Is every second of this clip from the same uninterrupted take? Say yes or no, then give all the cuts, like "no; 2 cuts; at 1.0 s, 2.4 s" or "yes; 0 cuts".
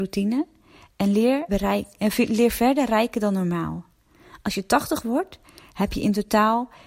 no; 1 cut; at 1.5 s